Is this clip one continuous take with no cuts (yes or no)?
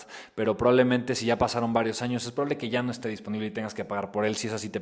yes